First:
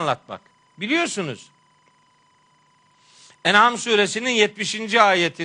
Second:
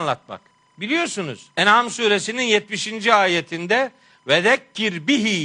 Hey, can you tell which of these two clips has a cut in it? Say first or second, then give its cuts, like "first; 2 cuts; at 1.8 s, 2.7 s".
second; 1 cut; at 1.5 s